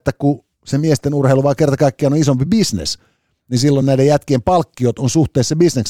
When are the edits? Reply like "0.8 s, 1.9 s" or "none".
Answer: none